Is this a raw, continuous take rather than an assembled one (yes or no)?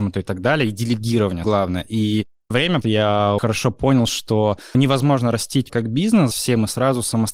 no